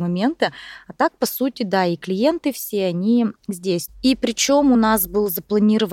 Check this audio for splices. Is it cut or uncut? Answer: uncut